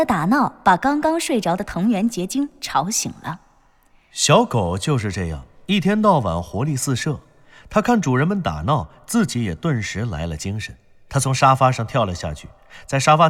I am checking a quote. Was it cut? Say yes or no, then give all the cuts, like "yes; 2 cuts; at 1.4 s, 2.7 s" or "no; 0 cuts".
no; 0 cuts